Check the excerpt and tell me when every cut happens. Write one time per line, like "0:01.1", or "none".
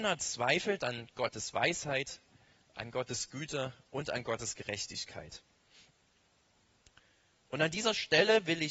none